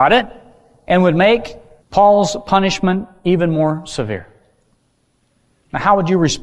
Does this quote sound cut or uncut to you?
cut